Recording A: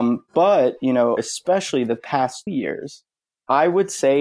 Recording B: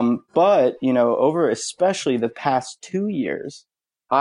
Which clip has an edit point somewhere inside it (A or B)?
A